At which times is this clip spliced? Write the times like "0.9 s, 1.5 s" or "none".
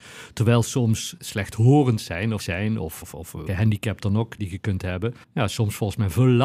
1.2 s, 2.4 s, 3.0 s, 3.5 s, 4.4 s, 5.2 s

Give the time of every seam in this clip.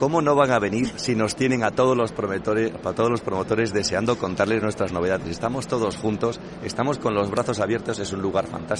none

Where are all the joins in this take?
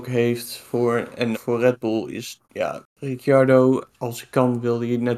1.3 s, 2.4 s, 3.9 s

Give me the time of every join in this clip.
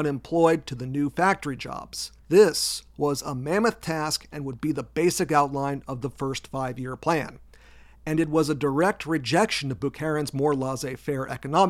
2.2 s

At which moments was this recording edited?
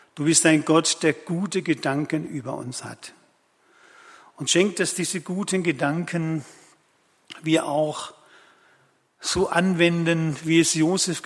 none

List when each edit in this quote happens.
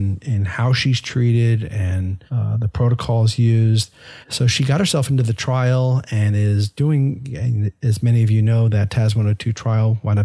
2.3 s, 4.2 s

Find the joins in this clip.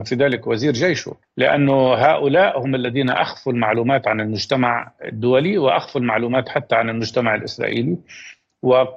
1.2 s

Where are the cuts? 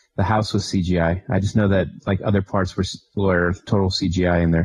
none

